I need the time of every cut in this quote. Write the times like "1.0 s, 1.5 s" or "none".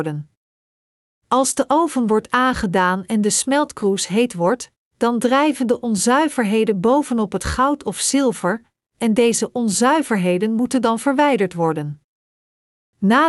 none

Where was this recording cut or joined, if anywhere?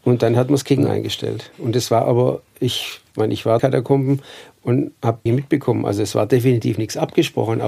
3.6 s, 5.3 s

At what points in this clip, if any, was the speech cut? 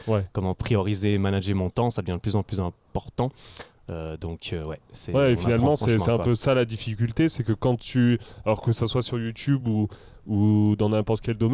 none

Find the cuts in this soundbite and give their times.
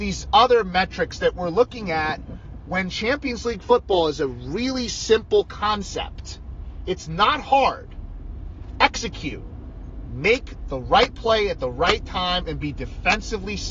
none

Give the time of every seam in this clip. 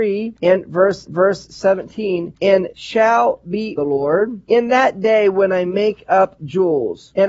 1.1 s, 2.7 s, 3.8 s, 6.4 s

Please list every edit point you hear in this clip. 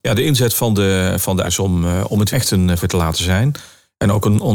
1.4 s, 2.3 s, 2.8 s

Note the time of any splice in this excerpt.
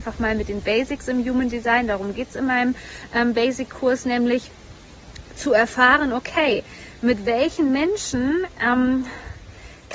none

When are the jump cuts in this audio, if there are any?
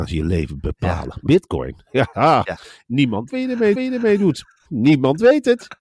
1.3 s, 3.3 s, 3.7 s

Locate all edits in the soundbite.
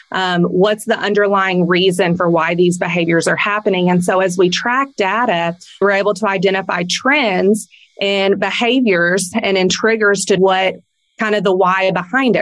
5.8 s, 10.4 s

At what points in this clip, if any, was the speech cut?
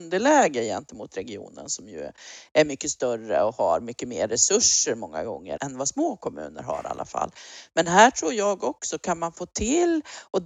5.6 s

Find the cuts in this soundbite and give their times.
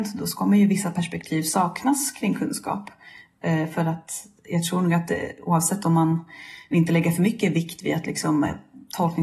4.4 s

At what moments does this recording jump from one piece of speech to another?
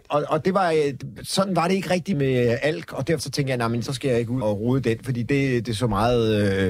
2.1 s, 3.2 s, 3.9 s, 4.4 s

